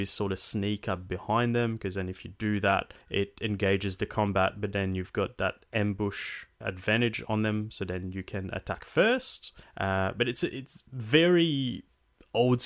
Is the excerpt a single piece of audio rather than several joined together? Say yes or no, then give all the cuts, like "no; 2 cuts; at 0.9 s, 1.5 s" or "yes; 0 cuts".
no; 3 cuts; at 3.0 s, 6.6 s, 9.6 s